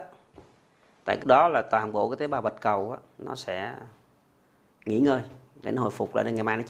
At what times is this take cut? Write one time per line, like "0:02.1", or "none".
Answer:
0:01.2